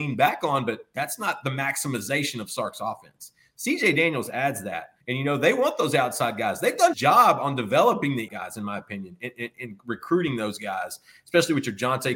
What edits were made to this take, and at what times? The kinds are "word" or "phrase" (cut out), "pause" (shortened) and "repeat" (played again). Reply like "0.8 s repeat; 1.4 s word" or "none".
5.0 s pause; 6.9 s word; 8.3 s word